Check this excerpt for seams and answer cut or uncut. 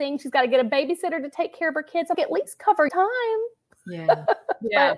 cut